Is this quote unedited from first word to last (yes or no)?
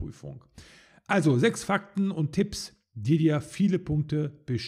yes